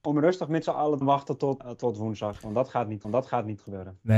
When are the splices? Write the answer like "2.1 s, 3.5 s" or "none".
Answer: 1.0 s, 1.6 s, 3.0 s